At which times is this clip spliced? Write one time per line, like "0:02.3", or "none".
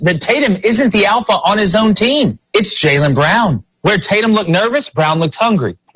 0:03.7